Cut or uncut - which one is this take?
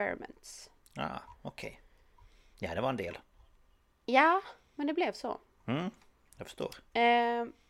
uncut